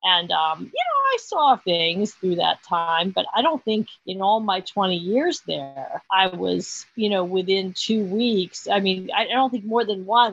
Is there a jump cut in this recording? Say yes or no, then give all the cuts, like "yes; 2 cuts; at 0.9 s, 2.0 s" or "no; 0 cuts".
yes; 3 cuts; at 1.6 s, 4.0 s, 6.0 s